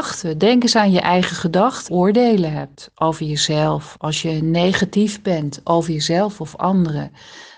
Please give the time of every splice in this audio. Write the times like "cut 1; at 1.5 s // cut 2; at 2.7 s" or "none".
cut 1; at 1.9 s